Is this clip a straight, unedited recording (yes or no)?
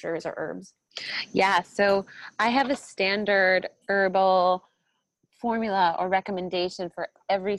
yes